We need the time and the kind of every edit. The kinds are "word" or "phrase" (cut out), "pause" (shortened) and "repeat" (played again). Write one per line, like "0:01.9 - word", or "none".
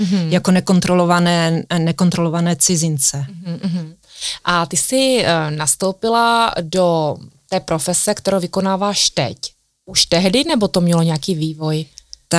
none